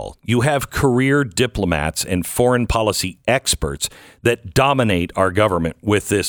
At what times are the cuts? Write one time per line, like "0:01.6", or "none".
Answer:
none